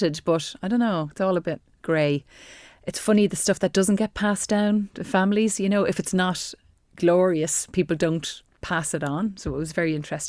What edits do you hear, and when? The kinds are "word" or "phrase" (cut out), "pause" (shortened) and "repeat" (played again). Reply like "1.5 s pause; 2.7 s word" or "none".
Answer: none